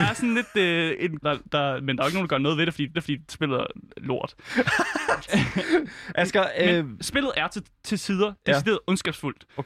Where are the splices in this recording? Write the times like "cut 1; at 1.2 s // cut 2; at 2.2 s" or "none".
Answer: cut 1; at 1.2 s // cut 2; at 2.9 s